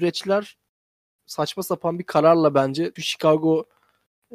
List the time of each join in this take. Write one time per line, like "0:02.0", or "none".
0:03.0

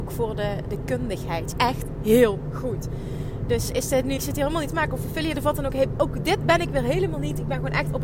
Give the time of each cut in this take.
0:01.5
0:04.2
0:04.7

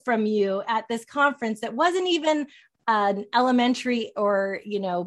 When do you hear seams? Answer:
none

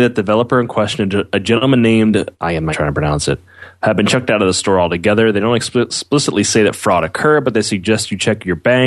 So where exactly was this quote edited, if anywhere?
0:02.3
0:02.7

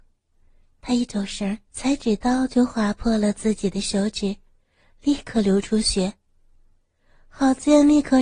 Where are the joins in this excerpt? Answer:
0:01.7

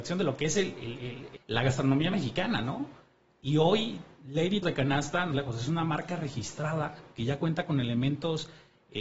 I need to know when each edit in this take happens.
0:01.4
0:04.6
0:05.3

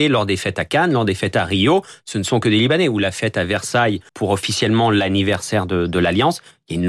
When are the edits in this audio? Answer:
0:04.1

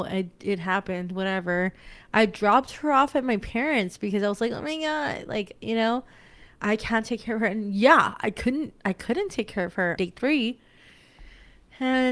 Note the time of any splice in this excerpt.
0:10.0

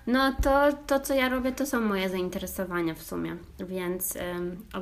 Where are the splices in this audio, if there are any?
none

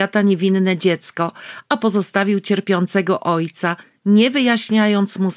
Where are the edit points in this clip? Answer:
none

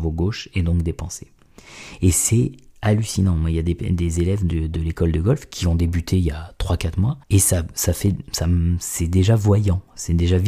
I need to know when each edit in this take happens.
0:07.2

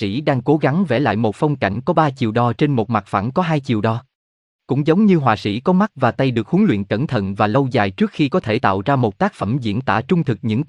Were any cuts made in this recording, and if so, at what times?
none

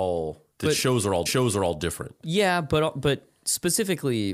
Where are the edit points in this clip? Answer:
0:01.3

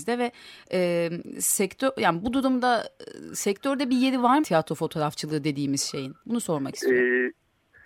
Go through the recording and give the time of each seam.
0:04.4
0:06.2

